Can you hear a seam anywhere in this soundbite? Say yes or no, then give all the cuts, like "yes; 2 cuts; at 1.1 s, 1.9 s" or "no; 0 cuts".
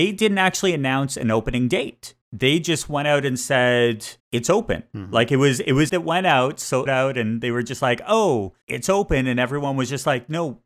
yes; 5 cuts; at 2.2 s, 4.2 s, 5.9 s, 6.9 s, 8.6 s